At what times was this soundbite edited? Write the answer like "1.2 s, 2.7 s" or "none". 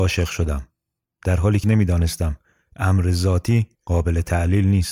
1.6 s, 3.7 s